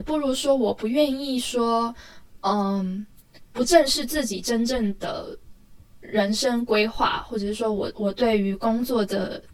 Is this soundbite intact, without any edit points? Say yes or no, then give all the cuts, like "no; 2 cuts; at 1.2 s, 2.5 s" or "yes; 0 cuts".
yes; 0 cuts